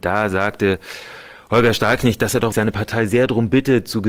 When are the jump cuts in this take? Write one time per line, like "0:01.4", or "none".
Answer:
0:02.5